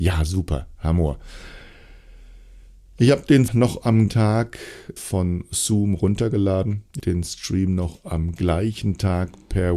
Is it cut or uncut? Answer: cut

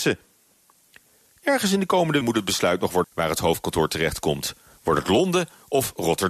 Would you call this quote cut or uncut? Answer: cut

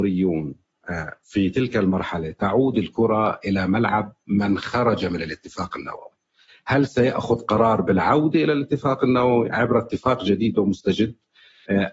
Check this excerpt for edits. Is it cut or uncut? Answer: uncut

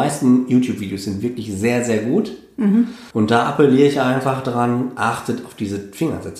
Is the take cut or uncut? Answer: cut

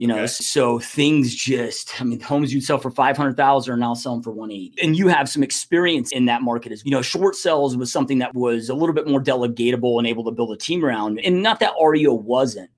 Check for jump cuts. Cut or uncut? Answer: cut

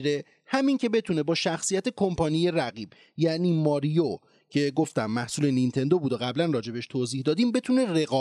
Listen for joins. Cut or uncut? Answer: uncut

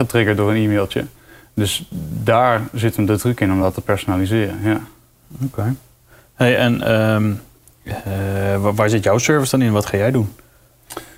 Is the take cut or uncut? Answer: uncut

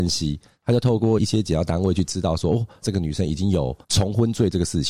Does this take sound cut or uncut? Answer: cut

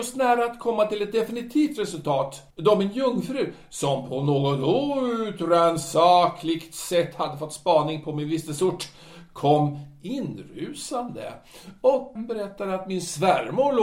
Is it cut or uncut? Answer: cut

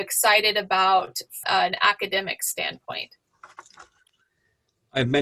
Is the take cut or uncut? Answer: cut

